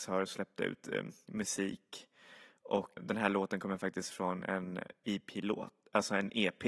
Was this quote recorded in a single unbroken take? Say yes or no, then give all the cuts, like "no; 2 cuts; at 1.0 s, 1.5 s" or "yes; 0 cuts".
no; 1 cut; at 3.0 s